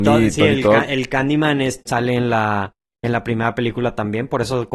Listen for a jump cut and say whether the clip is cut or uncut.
cut